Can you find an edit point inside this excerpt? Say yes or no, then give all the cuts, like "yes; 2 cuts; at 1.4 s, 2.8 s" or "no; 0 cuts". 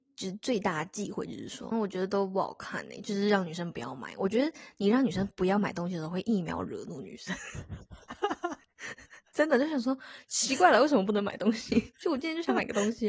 yes; 1 cut; at 1.7 s